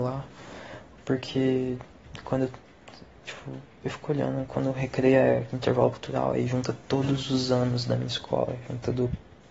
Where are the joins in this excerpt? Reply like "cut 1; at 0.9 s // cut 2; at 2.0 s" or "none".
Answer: cut 1; at 6.8 s